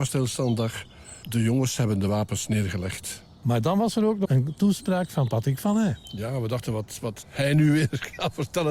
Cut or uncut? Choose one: cut